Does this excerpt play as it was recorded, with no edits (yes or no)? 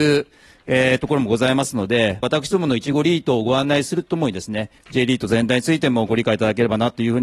no